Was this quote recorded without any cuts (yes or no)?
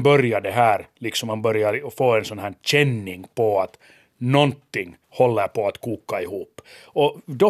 no